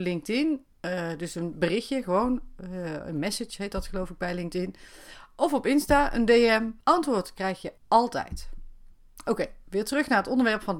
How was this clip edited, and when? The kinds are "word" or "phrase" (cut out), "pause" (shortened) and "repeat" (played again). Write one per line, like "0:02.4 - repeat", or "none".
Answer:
0:06.8 - pause
0:07.8 - pause